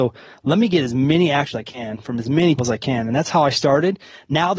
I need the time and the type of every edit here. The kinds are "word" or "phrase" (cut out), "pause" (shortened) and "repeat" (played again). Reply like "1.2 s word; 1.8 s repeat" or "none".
1.5 s phrase; 2.6 s word